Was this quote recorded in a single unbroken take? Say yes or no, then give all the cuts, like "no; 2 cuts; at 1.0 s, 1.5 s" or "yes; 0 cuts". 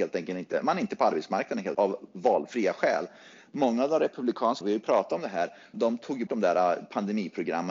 no; 4 cuts; at 1.7 s, 4.6 s, 5.7 s, 6.3 s